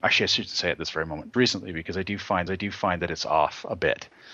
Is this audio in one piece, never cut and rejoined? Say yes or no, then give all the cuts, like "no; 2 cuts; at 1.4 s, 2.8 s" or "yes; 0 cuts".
no; 2 cuts; at 1.3 s, 2.5 s